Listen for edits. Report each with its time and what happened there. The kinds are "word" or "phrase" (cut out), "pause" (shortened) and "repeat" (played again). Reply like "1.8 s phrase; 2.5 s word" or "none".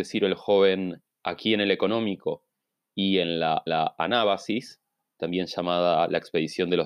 3.7 s repeat

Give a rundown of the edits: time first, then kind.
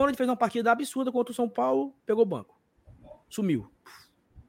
none

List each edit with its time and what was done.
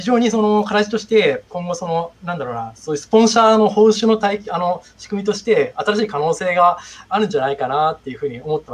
2.1 s pause

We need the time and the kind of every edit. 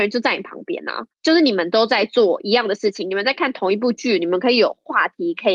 1.1 s pause

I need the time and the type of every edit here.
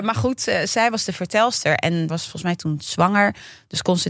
2.1 s word

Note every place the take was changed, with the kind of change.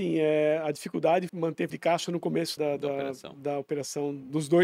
1.3 s word; 1.7 s word; 2.6 s word

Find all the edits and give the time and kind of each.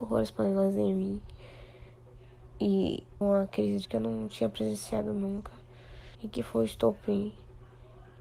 3.2 s phrase; 3.8 s word; 6.1 s pause

